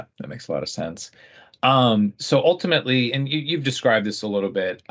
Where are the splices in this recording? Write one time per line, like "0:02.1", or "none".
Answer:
none